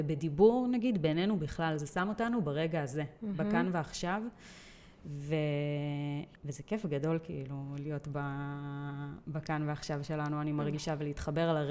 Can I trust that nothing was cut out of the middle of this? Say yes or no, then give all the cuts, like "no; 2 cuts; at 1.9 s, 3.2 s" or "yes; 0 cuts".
no; 1 cut; at 6.4 s